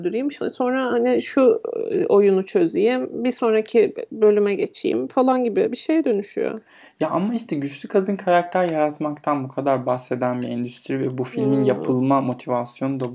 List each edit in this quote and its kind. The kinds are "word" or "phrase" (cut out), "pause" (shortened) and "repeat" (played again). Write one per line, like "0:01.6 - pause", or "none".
none